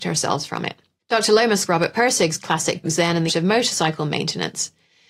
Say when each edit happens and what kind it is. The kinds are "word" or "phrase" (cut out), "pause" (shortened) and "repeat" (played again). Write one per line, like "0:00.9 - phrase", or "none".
0:01.7 - word
0:02.8 - word
0:03.3 - word